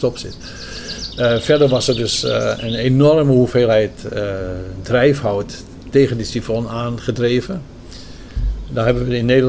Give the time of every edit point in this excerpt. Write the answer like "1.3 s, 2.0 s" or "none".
none

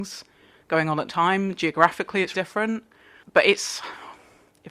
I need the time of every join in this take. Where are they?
1.1 s, 2.3 s

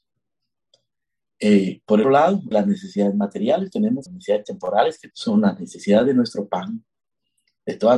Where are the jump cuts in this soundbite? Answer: 2.0 s, 2.5 s, 3.7 s, 4.1 s, 5.1 s

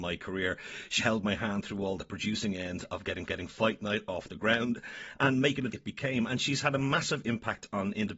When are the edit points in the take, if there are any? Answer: 1.0 s, 3.3 s, 5.7 s

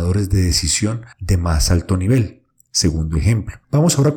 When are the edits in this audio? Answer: 1.1 s

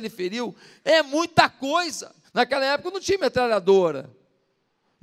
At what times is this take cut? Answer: 2.2 s

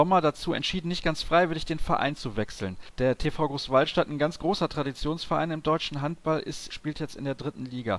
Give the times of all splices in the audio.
2.9 s, 6.7 s

